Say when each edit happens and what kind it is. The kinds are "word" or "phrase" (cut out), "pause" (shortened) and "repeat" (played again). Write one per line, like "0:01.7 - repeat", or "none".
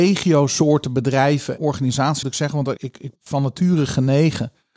0:01.6 - word
0:02.2 - word
0:02.8 - word
0:03.1 - word